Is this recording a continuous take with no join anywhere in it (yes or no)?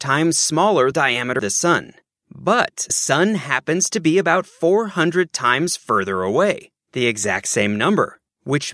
no